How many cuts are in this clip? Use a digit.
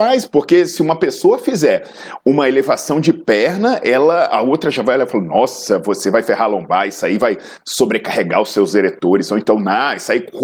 0